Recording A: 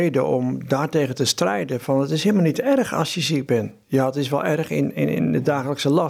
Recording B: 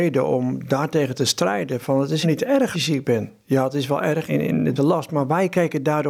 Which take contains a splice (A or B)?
B